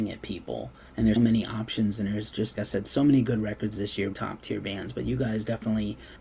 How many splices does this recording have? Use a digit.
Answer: 3